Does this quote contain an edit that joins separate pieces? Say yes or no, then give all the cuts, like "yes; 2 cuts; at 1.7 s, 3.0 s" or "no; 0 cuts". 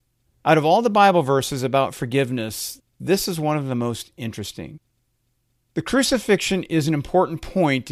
no; 0 cuts